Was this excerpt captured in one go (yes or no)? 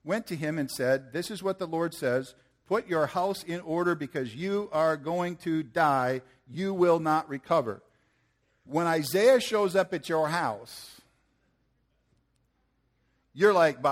yes